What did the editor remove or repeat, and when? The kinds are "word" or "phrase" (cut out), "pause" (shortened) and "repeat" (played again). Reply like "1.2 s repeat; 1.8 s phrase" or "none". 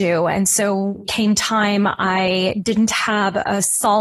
1.1 s phrase